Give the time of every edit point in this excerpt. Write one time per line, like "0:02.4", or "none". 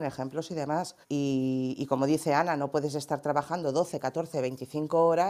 0:01.0